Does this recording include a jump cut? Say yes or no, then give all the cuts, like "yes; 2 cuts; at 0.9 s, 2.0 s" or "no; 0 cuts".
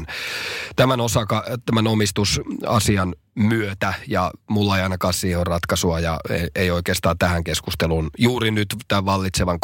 no; 0 cuts